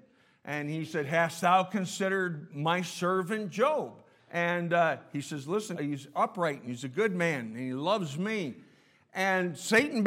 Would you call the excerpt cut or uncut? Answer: cut